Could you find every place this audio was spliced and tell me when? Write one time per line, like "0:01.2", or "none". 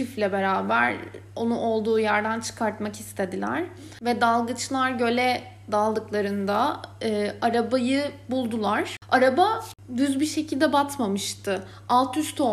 none